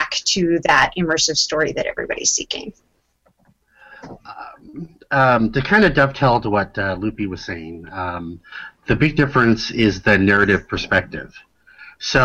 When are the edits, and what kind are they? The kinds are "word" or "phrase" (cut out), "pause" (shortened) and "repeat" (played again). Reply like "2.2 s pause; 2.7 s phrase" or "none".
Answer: none